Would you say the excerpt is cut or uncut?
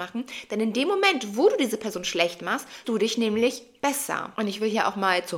cut